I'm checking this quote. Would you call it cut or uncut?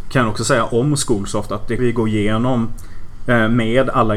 cut